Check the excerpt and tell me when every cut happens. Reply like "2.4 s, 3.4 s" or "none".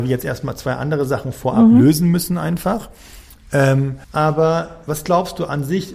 4.0 s